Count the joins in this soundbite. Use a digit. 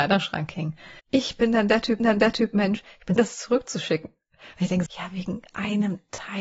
4